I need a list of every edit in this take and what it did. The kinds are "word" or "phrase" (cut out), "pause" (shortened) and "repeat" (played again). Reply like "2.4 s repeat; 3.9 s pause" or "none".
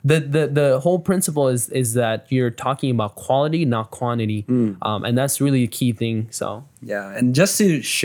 6.7 s pause